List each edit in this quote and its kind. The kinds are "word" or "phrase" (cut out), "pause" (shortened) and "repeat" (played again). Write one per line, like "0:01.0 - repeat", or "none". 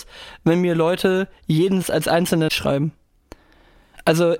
0:01.8 - word
0:02.5 - word